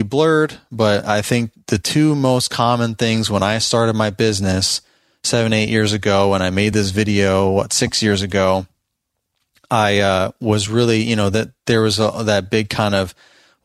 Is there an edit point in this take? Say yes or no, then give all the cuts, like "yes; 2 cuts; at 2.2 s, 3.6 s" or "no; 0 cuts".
no; 0 cuts